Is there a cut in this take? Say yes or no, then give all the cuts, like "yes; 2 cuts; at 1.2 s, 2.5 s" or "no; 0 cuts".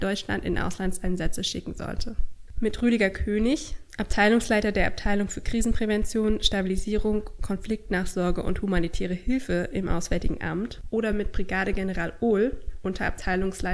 no; 0 cuts